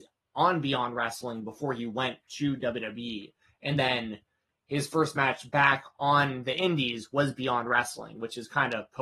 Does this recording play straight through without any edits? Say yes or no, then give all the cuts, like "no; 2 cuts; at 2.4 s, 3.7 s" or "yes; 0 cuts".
yes; 0 cuts